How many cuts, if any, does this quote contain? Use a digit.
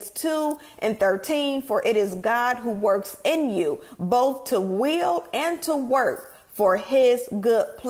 0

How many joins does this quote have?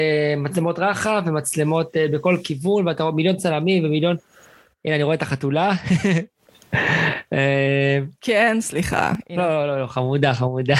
1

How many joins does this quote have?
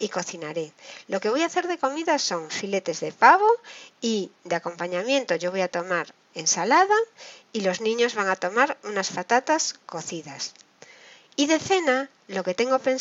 0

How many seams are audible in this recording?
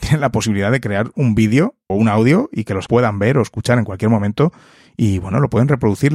2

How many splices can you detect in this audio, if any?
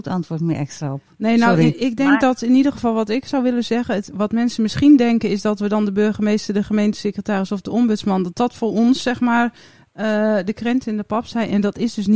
0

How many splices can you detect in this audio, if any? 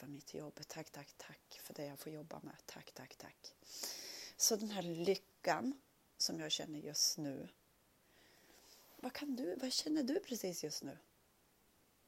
0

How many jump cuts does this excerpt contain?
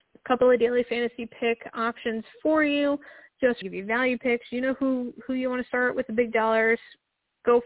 1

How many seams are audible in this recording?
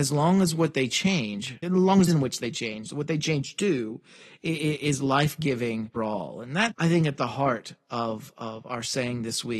4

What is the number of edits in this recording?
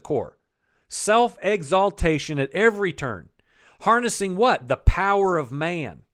0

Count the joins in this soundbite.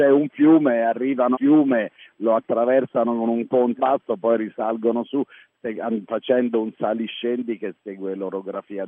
2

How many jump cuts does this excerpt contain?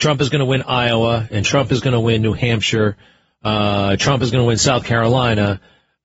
0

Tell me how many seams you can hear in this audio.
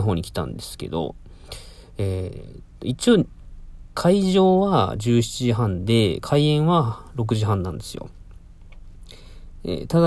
0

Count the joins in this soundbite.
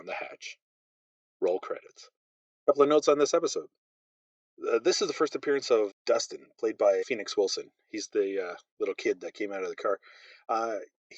2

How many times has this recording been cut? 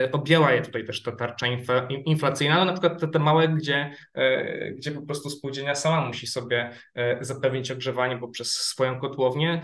0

